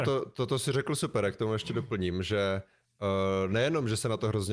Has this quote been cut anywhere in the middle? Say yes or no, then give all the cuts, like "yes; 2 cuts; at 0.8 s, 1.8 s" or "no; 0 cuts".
no; 0 cuts